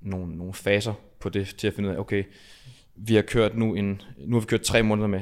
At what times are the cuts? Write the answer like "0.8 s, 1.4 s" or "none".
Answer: none